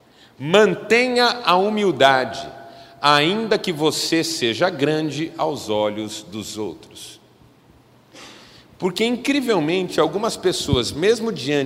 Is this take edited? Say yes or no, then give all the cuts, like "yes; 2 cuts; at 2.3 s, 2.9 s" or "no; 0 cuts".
no; 0 cuts